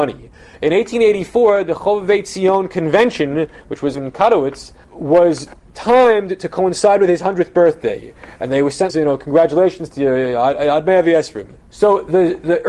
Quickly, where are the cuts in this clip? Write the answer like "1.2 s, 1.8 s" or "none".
3.9 s, 4.8 s, 8.9 s, 11.6 s